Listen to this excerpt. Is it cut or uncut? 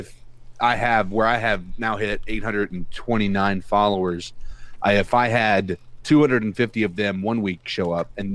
uncut